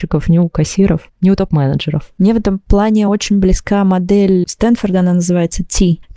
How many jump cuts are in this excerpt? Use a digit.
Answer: 0